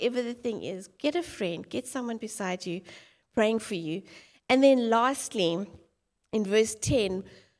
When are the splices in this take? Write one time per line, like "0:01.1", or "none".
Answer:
none